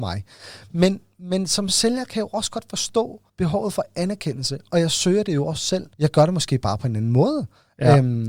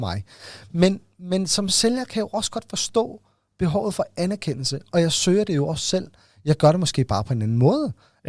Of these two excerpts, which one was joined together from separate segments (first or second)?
first